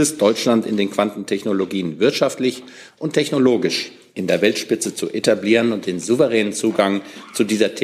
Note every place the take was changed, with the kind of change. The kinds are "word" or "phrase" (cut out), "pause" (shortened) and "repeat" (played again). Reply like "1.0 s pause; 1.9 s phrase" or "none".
none